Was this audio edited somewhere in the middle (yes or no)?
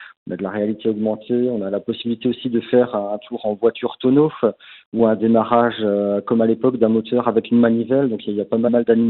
no